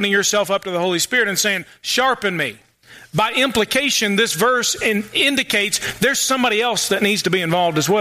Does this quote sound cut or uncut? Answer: uncut